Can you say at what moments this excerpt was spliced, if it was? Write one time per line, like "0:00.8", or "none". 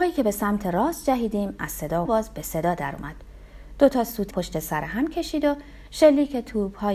0:02.1
0:04.3